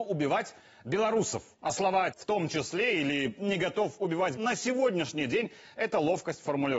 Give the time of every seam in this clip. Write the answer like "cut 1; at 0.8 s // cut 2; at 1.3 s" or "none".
cut 1; at 1.5 s // cut 2; at 2.1 s // cut 3; at 4.3 s